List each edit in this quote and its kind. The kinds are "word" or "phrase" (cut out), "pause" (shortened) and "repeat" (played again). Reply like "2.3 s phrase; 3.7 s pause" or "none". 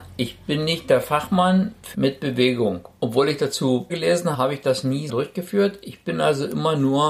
1.9 s word; 3.9 s word; 4.3 s word; 5.1 s word